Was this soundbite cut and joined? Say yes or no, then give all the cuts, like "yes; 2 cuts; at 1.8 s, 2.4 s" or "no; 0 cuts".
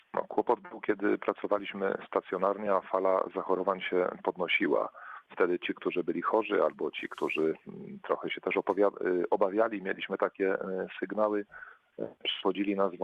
no; 0 cuts